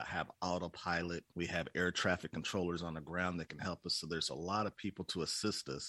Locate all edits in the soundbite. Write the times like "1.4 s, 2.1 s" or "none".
1.3 s